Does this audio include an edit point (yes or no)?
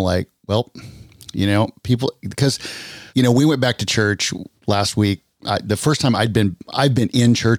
yes